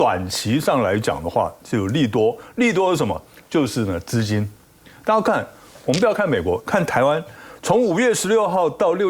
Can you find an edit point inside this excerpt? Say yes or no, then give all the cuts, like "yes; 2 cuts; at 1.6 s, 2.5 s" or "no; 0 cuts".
no; 0 cuts